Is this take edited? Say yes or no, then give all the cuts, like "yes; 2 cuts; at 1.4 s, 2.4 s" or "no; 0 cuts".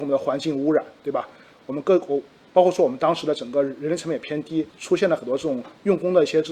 yes; 1 cut; at 4.7 s